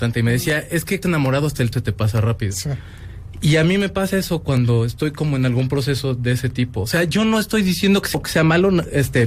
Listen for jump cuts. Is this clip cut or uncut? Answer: cut